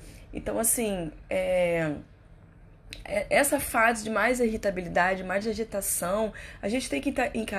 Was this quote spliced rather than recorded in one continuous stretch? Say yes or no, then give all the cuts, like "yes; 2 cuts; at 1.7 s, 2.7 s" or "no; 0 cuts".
no; 0 cuts